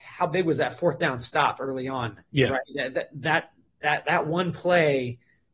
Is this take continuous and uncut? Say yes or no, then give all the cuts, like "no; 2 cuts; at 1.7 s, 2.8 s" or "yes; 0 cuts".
yes; 0 cuts